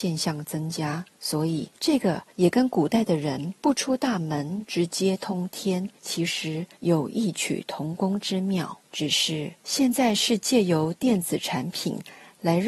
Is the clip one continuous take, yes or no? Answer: no